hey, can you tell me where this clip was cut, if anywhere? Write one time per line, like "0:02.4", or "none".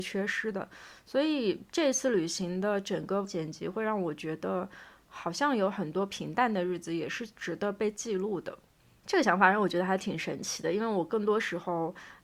0:03.2